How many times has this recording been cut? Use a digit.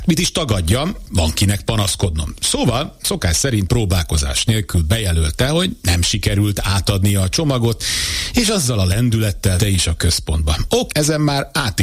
4